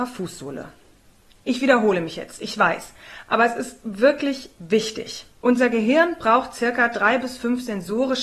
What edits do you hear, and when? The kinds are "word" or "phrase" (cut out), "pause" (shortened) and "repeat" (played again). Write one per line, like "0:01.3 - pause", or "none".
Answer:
0:01.0 - pause
0:05.3 - pause